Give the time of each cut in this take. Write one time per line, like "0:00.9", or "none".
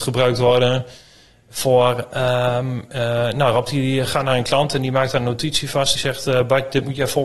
0:06.0